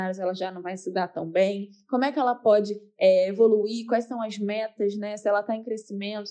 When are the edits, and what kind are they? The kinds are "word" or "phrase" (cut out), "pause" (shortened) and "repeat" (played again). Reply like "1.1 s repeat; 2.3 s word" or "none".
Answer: none